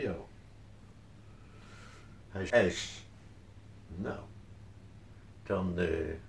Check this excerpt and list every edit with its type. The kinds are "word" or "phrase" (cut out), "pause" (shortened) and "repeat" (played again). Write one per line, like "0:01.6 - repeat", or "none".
0:02.5 - word